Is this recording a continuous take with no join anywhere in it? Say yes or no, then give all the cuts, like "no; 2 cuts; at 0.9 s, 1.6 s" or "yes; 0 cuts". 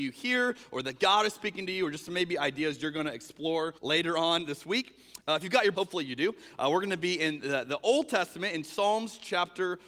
no; 2 cuts; at 3.8 s, 5.7 s